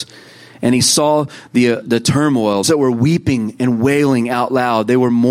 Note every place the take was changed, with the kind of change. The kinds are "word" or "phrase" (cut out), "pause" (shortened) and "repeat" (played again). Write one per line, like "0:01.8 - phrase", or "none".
0:01.8 - word
0:02.6 - phrase